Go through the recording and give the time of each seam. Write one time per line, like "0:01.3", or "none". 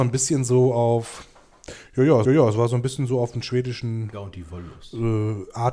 0:02.2
0:04.1

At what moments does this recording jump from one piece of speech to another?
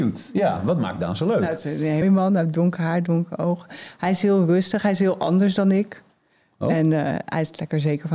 0:02.0

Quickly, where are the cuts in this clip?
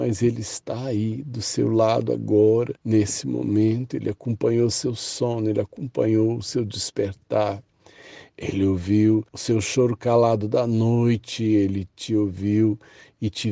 0:02.8
0:09.3

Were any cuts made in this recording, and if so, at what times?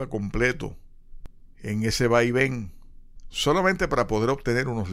none

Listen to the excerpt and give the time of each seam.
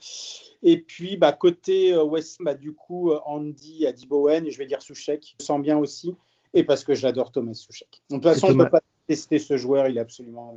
0:02.4
0:05.4

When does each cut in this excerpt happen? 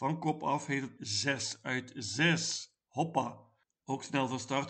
0:01.0

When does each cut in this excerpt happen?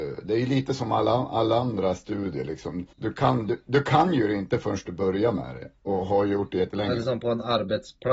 0:02.9

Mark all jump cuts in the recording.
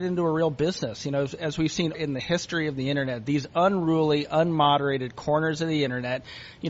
0:01.9

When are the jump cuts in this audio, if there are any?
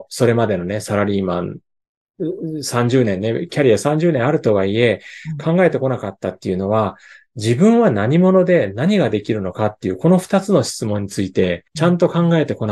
0:11.7

